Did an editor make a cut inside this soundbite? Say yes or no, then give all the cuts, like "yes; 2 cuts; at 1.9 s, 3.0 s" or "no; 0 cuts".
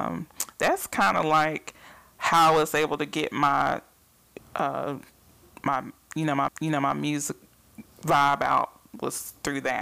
yes; 2 cuts; at 4.4 s, 6.5 s